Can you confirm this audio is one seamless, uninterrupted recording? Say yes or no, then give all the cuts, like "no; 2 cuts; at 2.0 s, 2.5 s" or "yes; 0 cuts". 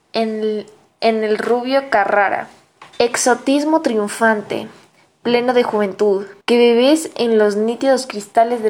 no; 2 cuts; at 2.9 s, 6.4 s